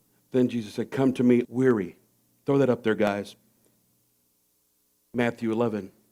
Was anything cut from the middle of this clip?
yes; 1 cut; at 1.4 s

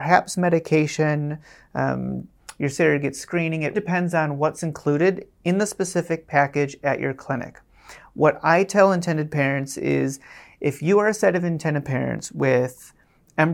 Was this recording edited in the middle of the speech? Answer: yes; 1 cut; at 3.7 s

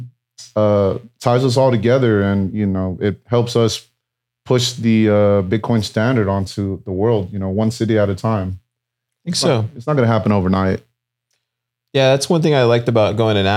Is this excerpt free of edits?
yes; 0 cuts

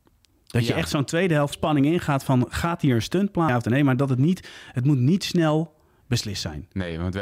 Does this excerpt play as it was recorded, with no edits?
no; 2 cuts; at 1.5 s, 3.5 s

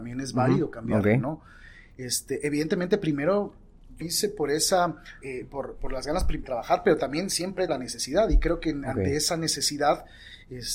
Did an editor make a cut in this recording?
yes; 4 cuts; at 4.0 s, 5.2 s, 6.4 s, 7.7 s

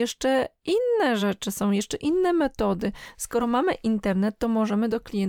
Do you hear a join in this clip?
no; 0 cuts

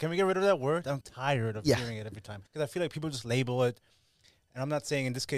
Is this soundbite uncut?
no; 2 cuts; at 1.0 s, 2.5 s

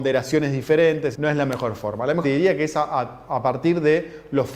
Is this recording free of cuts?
no; 2 cuts; at 1.1 s, 2.2 s

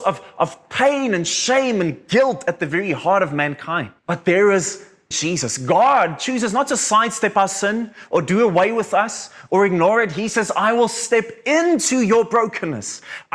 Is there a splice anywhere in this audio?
yes; 2 cuts; at 4.0 s, 5.1 s

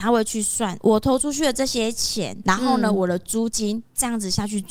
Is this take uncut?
yes; 0 cuts

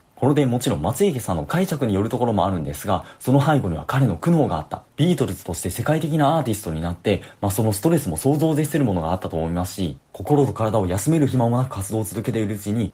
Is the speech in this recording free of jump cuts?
no; 1 cut; at 4.9 s

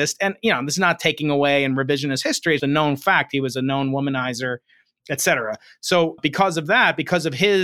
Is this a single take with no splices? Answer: no; 2 cuts; at 2.6 s, 6.2 s

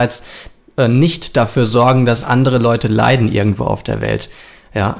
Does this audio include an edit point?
no; 0 cuts

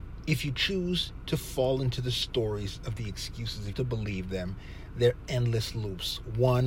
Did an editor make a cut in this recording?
yes; 1 cut; at 3.7 s

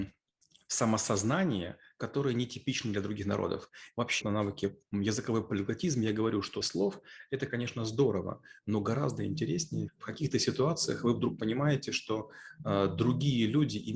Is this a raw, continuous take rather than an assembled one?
no; 3 cuts; at 4.2 s, 6.6 s, 9.9 s

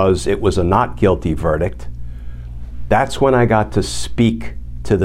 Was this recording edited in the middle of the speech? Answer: no; 0 cuts

